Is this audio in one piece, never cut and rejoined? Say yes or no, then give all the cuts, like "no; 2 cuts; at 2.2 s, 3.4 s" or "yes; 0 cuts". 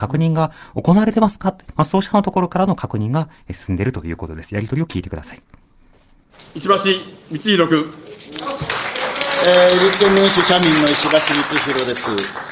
yes; 0 cuts